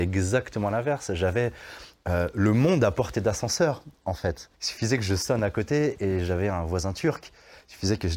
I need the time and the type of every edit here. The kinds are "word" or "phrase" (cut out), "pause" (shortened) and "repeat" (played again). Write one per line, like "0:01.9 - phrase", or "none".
0:04.5 - pause